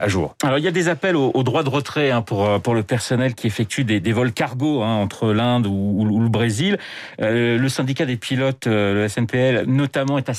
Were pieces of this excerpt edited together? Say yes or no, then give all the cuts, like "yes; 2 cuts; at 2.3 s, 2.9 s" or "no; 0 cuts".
no; 0 cuts